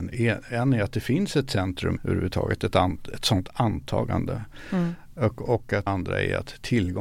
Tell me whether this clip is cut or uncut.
cut